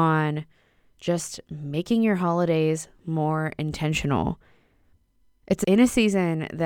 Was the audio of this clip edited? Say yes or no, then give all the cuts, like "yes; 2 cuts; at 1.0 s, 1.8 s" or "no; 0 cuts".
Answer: no; 0 cuts